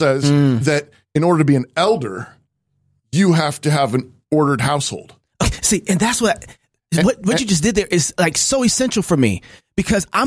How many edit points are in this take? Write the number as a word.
zero